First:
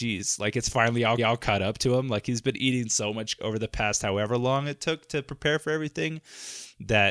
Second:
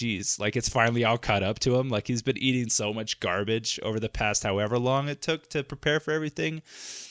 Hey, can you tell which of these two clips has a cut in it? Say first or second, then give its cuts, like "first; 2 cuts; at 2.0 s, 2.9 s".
first; 2 cuts; at 1.2 s, 3.4 s